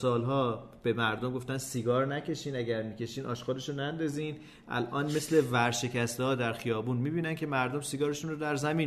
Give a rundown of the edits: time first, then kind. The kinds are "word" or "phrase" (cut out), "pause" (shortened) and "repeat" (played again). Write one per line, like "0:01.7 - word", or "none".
none